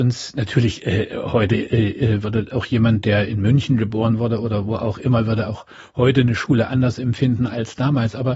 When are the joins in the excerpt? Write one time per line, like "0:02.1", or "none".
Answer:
none